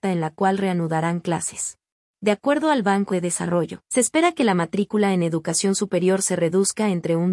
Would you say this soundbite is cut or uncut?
cut